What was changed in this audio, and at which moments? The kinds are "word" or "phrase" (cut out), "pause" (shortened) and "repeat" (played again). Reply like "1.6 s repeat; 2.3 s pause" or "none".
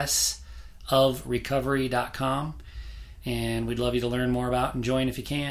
none